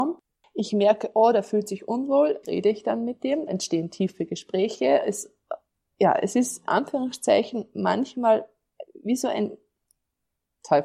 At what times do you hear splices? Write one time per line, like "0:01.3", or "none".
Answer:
0:02.4
0:03.5
0:06.7